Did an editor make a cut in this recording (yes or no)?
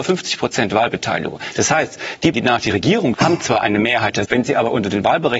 yes